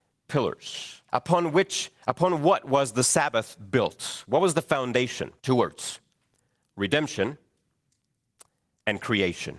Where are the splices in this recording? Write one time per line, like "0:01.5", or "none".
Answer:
0:01.1
0:02.0
0:05.4